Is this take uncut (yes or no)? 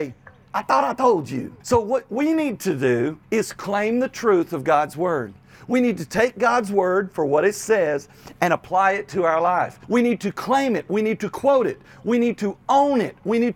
no